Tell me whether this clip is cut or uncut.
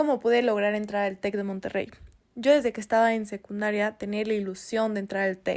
uncut